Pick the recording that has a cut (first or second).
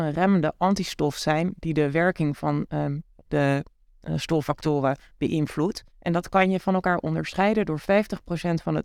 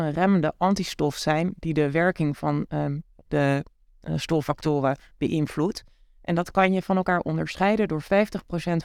first